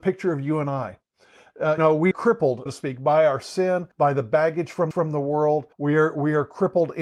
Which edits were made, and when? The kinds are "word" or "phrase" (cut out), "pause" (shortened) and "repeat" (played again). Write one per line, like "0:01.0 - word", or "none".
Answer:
0:01.8 - word
0:02.1 - word
0:02.7 - word
0:03.9 - pause
0:04.9 - repeat
0:05.7 - pause